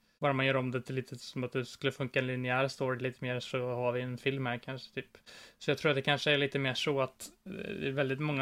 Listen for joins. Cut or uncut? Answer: uncut